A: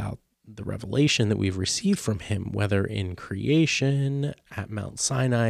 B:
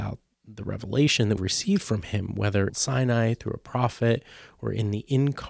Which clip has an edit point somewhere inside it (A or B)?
B